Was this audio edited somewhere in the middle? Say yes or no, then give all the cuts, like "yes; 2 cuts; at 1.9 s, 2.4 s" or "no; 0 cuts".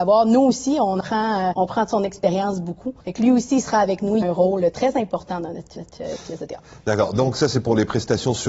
yes; 5 cuts; at 1.0 s, 1.5 s, 3.0 s, 4.2 s, 5.8 s